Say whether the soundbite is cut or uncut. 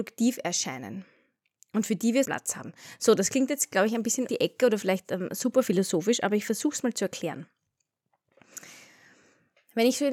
cut